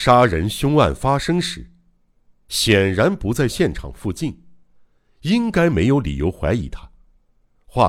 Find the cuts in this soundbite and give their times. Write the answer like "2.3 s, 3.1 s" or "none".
none